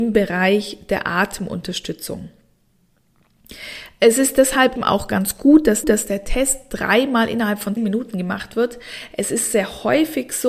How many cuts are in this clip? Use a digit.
3